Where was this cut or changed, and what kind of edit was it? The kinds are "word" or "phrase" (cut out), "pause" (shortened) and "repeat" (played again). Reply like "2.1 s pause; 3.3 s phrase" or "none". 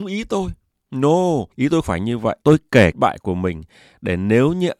1.5 s pause; 1.8 s word; 2.4 s pause; 2.9 s phrase